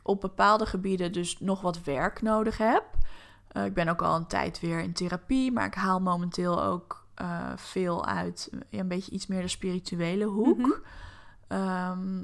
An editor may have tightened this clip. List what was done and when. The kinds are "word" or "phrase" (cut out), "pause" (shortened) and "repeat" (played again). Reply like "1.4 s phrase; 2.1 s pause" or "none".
none